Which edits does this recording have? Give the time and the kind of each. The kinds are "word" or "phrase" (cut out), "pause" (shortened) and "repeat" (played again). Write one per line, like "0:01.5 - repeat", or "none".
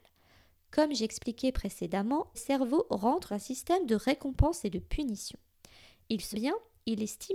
0:02.3 - word
0:03.3 - word
0:06.3 - word